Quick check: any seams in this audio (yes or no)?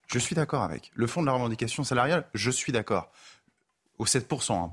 no